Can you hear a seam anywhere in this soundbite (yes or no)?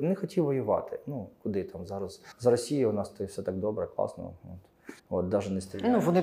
yes